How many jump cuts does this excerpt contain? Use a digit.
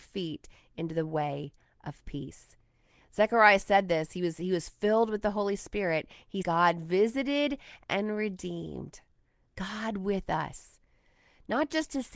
1